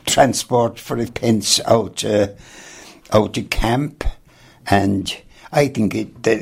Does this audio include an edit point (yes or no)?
yes